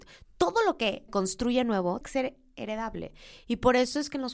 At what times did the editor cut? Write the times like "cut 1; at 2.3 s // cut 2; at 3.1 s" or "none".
cut 1; at 1.1 s // cut 2; at 2.0 s